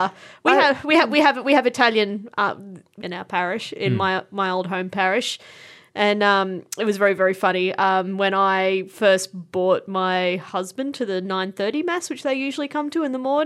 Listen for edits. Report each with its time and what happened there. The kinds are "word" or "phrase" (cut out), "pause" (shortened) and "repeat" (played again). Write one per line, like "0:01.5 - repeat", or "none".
0:03.0 - phrase

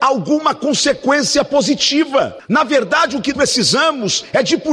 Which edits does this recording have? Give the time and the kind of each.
0:03.3 - word

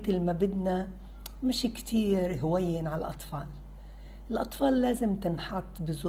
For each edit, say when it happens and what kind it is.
none

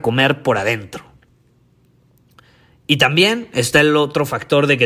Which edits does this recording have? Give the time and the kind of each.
none

